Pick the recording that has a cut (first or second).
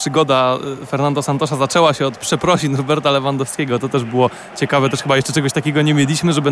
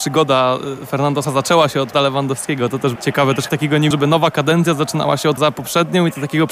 second